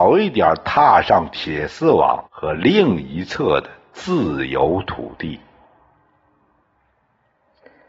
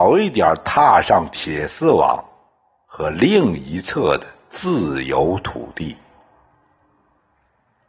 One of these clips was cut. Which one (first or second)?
first